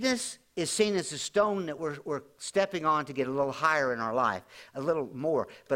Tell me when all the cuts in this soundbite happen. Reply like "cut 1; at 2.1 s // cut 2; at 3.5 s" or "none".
none